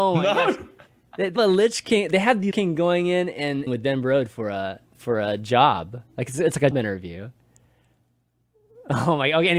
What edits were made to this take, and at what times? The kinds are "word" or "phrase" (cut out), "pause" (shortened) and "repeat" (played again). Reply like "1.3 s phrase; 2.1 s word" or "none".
1.4 s word; 2.5 s word; 3.7 s word; 4.9 s pause; 6.7 s word